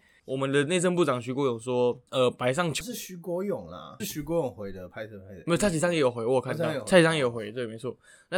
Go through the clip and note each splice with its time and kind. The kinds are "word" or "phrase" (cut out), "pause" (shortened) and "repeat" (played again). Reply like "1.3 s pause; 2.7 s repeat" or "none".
2.1 s pause; 2.8 s word; 4.0 s word